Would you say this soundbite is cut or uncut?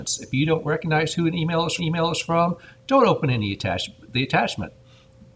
cut